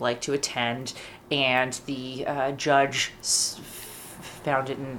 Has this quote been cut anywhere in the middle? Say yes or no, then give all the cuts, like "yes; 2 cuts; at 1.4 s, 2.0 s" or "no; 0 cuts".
no; 0 cuts